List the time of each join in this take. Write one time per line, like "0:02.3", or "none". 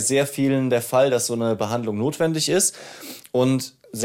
none